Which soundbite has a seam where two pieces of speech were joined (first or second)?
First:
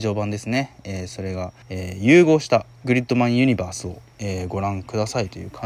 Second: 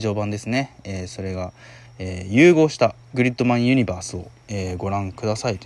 first